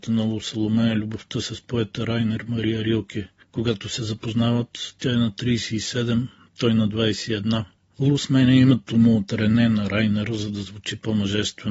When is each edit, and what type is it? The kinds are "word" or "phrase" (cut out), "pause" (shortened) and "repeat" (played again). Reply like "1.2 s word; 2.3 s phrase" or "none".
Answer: none